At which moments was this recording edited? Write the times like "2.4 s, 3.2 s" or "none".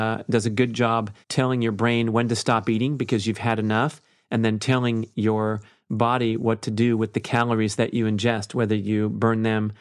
1.2 s